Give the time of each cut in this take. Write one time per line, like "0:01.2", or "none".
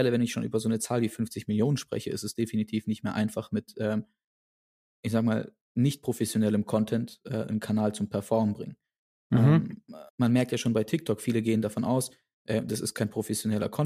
0:05.6
0:10.1

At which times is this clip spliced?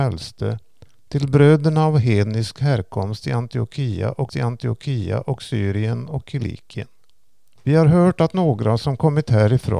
0:04.3

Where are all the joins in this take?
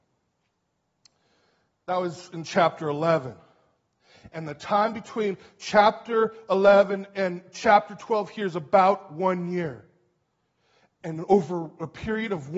none

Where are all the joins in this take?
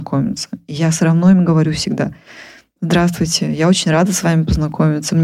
none

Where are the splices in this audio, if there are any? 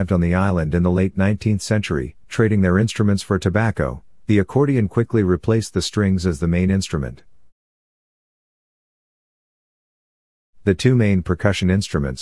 0:02.2

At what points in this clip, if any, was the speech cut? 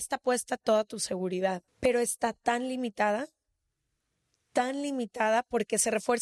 0:01.7

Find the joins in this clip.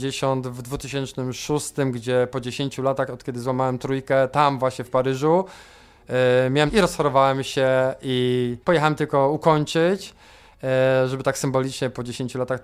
0:06.7
0:08.6

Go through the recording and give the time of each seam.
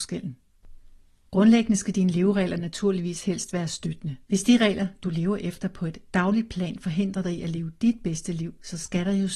0:04.2

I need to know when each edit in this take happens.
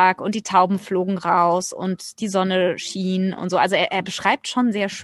none

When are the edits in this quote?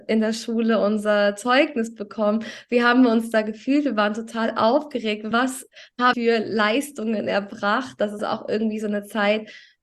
0:05.3
0:06.1
0:08.2

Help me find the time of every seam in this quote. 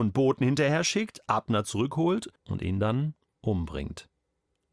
0:02.4

